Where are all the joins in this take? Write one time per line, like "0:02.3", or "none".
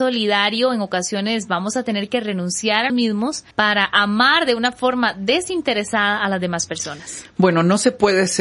0:02.9
0:03.5